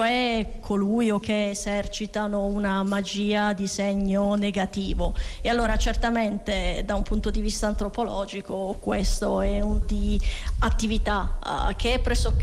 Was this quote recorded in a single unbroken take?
no; 2 cuts; at 1.2 s, 9.8 s

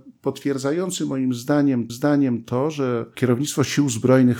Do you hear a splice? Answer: yes; 1 cut; at 1.9 s

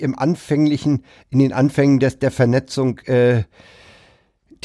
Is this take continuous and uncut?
yes; 0 cuts

